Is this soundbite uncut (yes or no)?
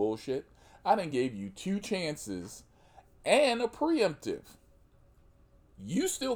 yes